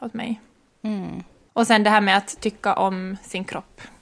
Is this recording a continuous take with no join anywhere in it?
yes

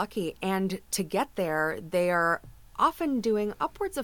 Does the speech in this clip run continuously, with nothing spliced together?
yes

